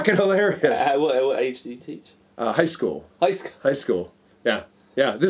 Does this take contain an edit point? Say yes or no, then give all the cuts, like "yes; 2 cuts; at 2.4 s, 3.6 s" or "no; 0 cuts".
no; 0 cuts